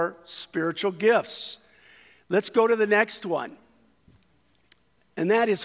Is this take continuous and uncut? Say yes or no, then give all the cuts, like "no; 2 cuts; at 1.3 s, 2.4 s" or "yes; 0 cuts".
yes; 0 cuts